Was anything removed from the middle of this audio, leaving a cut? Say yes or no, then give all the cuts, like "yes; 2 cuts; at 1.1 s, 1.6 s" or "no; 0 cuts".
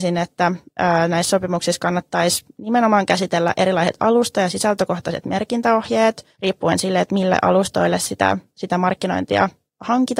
yes; 1 cut; at 6.3 s